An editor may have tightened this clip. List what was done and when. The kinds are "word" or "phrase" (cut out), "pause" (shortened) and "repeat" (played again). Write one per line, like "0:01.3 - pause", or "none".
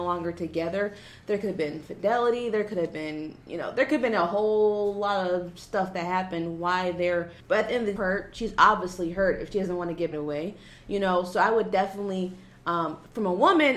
0:03.4 - pause
0:07.4 - pause
0:08.0 - phrase
0:10.1 - phrase

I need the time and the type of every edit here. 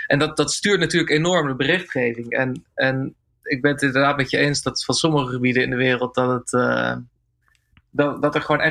none

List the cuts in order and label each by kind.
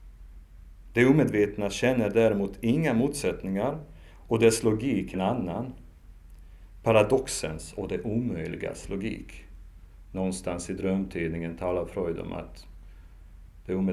0:05.1 - word

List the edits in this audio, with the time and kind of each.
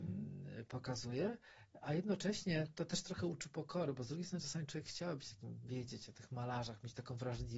none

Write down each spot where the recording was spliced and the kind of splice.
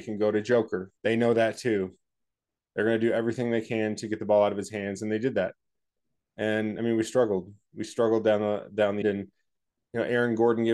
0:01.0 - pause
0:09.0 - word

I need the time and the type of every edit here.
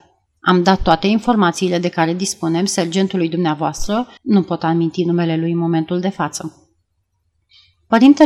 0:04.2 - pause

